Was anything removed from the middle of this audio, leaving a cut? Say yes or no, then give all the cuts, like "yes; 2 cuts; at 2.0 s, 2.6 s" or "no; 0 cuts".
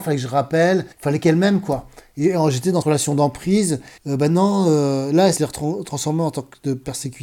yes; 4 cuts; at 0.9 s, 2.8 s, 4.0 s, 5.4 s